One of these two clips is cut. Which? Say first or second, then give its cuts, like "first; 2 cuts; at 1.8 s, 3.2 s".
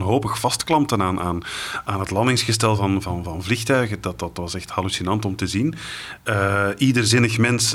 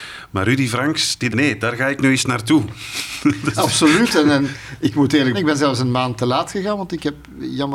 second; 2 cuts; at 1.3 s, 5.3 s